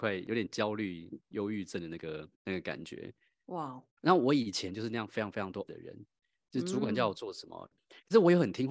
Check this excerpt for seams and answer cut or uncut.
cut